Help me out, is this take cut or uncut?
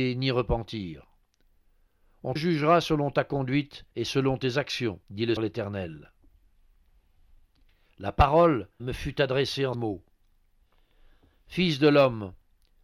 cut